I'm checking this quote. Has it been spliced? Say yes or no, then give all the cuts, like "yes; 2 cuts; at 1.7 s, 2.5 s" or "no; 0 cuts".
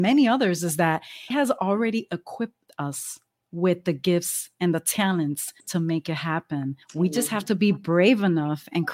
yes; 3 cuts; at 1.3 s, 5.6 s, 6.8 s